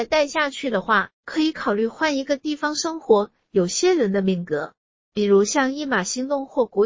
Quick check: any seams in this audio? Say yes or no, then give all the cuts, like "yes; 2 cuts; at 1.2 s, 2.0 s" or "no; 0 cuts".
no; 0 cuts